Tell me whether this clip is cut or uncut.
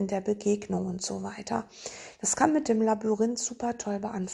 uncut